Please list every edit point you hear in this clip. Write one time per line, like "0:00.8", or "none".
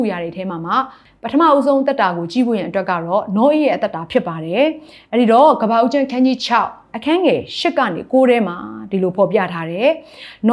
none